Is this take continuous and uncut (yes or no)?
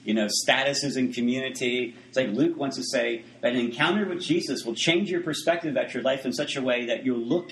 yes